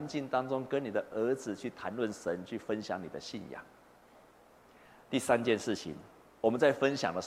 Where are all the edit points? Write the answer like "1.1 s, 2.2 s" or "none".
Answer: none